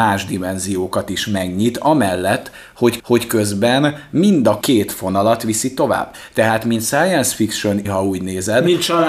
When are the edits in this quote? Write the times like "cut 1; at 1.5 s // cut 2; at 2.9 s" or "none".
cut 1; at 3.0 s // cut 2; at 4.6 s // cut 3; at 7.8 s